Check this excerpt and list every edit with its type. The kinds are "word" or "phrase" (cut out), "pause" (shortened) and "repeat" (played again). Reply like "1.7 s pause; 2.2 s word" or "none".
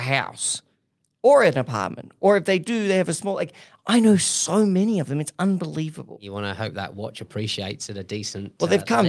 none